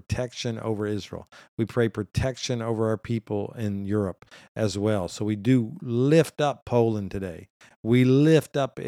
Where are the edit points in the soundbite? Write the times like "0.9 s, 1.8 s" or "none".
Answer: none